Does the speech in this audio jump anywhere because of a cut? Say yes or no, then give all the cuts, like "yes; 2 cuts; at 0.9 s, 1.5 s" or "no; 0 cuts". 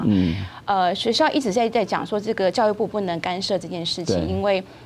no; 0 cuts